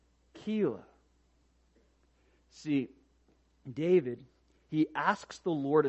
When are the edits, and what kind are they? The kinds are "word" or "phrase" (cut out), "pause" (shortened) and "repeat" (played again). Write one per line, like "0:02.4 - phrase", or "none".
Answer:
none